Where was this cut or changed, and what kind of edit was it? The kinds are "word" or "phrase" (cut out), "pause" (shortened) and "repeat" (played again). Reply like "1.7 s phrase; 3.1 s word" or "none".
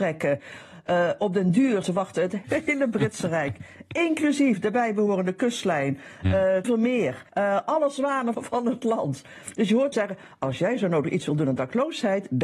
1.8 s phrase; 2.4 s word; 6.6 s phrase; 7.3 s pause; 8.3 s word; 9.9 s word

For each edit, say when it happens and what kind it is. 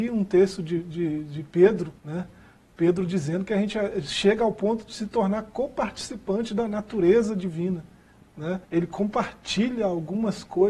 2.0 s pause; 8.6 s pause

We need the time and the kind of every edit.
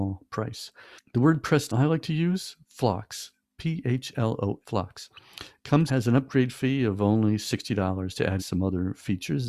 1.7 s word; 4.6 s word; 5.9 s phrase; 8.4 s word

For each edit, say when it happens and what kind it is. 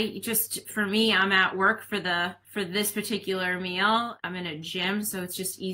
none

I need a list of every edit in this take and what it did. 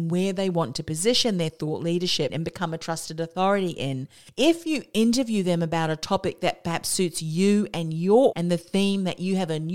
2.3 s word; 8.3 s word

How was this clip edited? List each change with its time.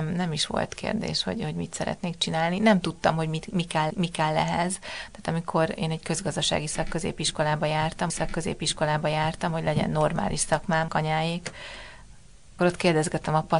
3.9 s repeat; 8.1 s repeat; 10.9 s word; 12.6 s phrase

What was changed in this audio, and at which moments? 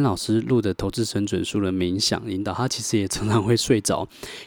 none

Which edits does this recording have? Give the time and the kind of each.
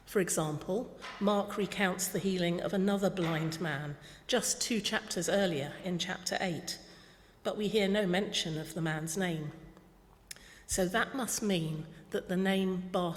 none

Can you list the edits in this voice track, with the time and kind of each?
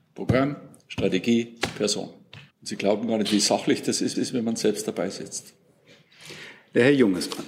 2.5 s pause; 4.1 s repeat

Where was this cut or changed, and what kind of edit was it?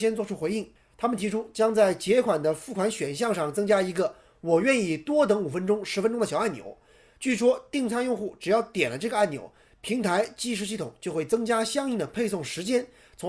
none

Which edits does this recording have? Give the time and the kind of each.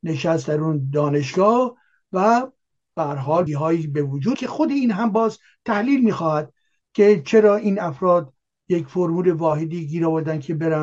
3.5 s word; 4.3 s word

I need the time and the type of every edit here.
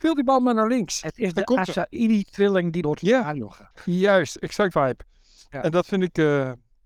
2.8 s word; 3.7 s pause; 4.7 s word

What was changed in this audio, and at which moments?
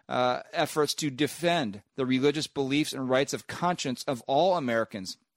none

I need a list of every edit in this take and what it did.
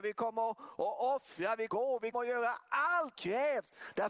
1.7 s phrase; 2.1 s word; 3.1 s word

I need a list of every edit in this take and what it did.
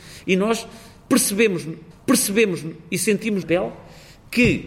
1.9 s repeat; 3.4 s word

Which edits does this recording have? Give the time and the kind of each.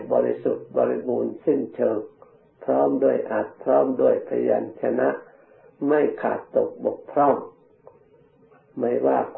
none

